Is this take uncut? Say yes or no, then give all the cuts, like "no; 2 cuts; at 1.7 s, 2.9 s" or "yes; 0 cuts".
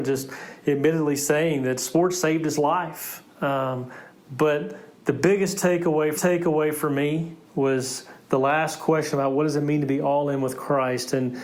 no; 3 cuts; at 3.3 s, 6.2 s, 7.4 s